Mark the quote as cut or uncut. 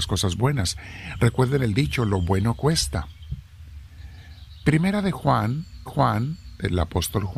cut